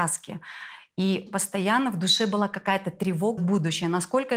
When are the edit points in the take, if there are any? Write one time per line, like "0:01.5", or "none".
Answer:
0:01.3
0:03.4